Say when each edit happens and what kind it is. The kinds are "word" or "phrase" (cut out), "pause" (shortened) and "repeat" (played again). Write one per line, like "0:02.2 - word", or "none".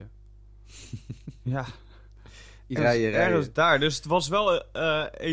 0:02.8 - word

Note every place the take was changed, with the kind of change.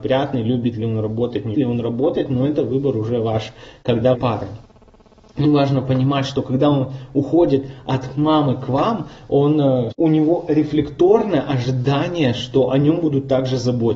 0:01.5 - word
0:04.1 - phrase
0:05.4 - word
0:09.9 - word

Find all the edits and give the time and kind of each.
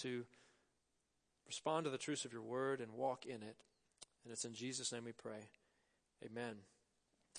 none

